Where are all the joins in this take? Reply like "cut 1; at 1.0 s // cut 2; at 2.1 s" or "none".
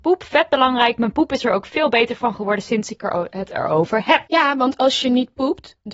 cut 1; at 4.3 s

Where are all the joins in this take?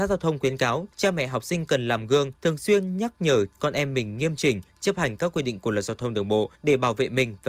cut 1; at 0.9 s // cut 2; at 2.3 s // cut 3; at 6.5 s

